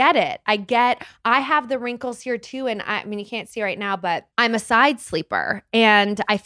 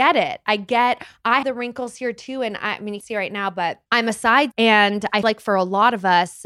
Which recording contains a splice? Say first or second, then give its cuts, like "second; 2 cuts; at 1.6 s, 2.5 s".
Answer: second; 4 cuts; at 1.4 s, 3.0 s, 4.5 s, 5.2 s